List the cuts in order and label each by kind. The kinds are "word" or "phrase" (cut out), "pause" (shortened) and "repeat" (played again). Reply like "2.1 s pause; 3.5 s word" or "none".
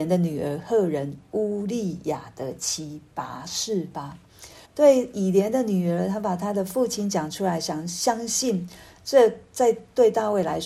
4.6 s pause